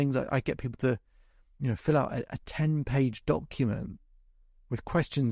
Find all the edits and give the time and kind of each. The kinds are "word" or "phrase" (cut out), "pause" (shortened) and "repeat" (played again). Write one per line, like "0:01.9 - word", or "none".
none

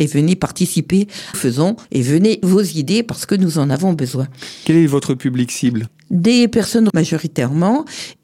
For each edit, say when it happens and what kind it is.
0:01.3 - phrase
0:01.8 - pause
0:02.4 - phrase
0:06.9 - word

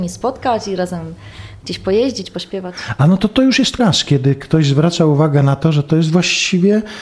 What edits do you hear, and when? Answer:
0:03.8 - word

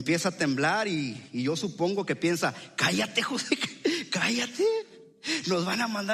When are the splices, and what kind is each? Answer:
none

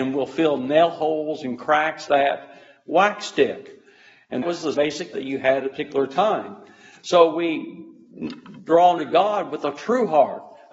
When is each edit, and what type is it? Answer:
0:02.1 - word
0:04.4 - word
0:04.7 - word
0:05.1 - word
0:05.7 - word
0:09.0 - word

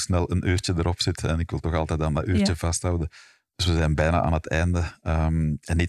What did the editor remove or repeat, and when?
none

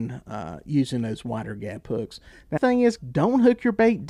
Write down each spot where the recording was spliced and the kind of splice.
0:02.6 - word
0:03.0 - word

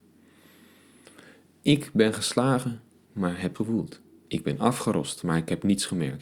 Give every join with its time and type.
0:03.5 - word

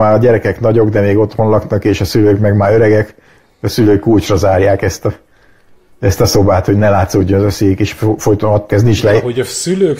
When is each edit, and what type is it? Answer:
0:08.7 - word

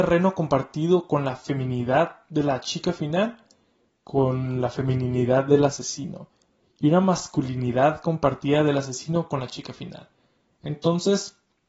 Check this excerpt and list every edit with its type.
none

